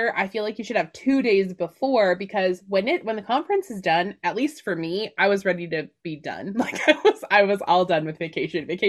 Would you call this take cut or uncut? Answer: uncut